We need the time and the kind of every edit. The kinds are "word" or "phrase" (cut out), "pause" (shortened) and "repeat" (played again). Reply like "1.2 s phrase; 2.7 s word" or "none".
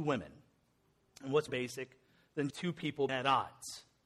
1.5 s word; 2.5 s word; 3.1 s word